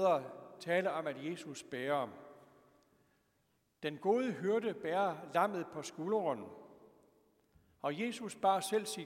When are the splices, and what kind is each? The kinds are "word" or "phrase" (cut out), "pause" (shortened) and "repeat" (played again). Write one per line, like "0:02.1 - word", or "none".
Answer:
none